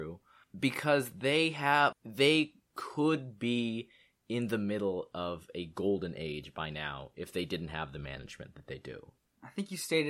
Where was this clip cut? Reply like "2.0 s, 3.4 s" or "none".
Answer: 1.9 s